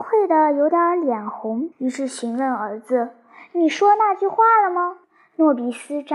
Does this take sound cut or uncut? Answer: cut